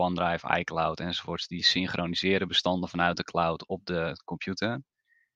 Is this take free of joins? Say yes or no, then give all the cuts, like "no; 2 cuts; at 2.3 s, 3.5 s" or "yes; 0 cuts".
yes; 0 cuts